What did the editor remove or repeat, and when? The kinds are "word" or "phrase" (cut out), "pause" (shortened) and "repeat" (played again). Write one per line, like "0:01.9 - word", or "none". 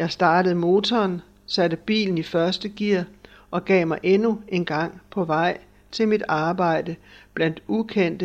none